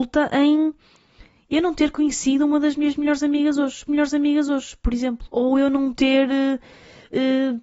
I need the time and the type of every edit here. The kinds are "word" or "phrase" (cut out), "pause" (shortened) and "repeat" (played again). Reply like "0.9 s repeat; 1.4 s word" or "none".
3.9 s repeat; 5.3 s pause